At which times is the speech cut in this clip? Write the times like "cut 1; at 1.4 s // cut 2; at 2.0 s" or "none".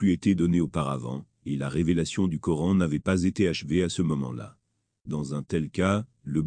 none